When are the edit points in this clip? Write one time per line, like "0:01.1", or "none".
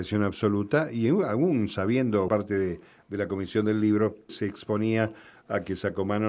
0:02.3
0:04.3